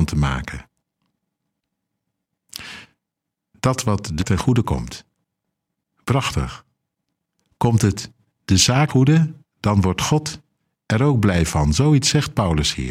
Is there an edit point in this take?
yes; 3 cuts; at 4.2 s, 8.9 s, 9.4 s

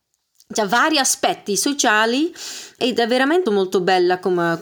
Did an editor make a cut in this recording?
yes; 2 cuts; at 2.8 s, 3.5 s

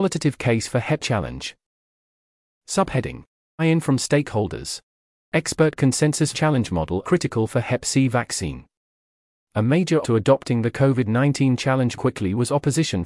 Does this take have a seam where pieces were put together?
yes; 6 cuts; at 1.0 s, 3.6 s, 6.3 s, 7.0 s, 10.0 s, 11.9 s

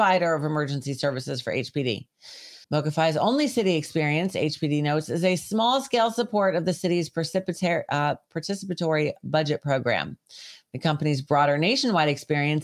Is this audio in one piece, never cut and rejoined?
no; 1 cut; at 2.6 s

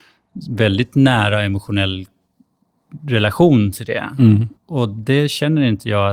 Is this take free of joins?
no; 1 cut; at 4.6 s

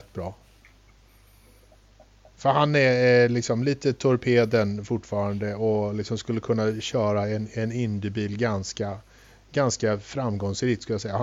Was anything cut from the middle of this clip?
no; 0 cuts

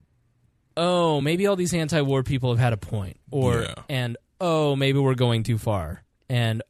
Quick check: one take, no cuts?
yes; 0 cuts

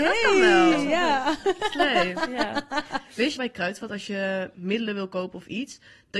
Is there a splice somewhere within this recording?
yes; 2 cuts; at 3.4 s, 4.5 s

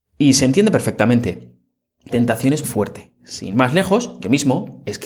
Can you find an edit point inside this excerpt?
yes; 3 cuts; at 2.1 s, 2.6 s, 3.5 s

